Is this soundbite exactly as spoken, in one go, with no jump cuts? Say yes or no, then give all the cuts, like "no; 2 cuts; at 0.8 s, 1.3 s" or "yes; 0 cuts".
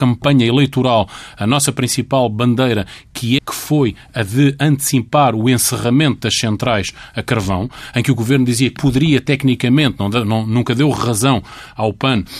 no; 2 cuts; at 3.4 s, 8.8 s